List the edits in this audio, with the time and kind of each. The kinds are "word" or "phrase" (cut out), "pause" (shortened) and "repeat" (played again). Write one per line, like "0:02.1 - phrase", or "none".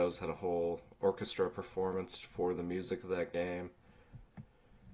none